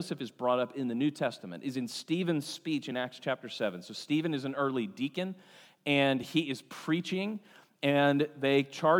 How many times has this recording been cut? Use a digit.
0